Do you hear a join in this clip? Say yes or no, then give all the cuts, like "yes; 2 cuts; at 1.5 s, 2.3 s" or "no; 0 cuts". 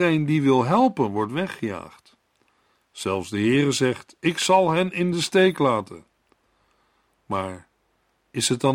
no; 0 cuts